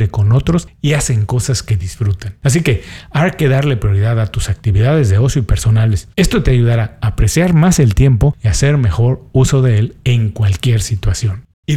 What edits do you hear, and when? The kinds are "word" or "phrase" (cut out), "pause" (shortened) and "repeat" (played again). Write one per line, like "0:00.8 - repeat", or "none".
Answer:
0:06.1 - pause